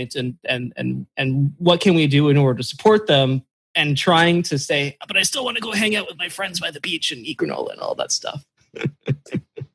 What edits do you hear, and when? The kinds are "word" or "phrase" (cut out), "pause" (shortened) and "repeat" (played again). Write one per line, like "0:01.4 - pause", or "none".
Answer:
none